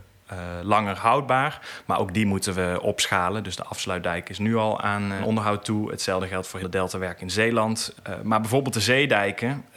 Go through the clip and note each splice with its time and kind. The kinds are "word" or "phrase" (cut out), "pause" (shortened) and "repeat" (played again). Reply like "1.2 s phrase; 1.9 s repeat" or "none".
6.6 s phrase